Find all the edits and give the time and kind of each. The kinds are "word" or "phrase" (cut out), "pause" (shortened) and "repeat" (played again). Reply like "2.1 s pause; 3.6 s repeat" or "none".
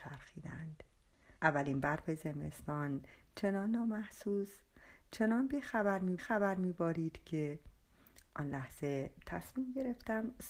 1.4 s pause; 6.2 s repeat